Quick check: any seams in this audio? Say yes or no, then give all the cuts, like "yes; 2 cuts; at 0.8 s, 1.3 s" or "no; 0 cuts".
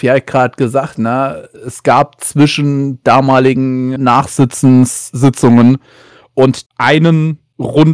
yes; 5 cuts; at 0.9 s, 1.6 s, 3.0 s, 4.0 s, 6.7 s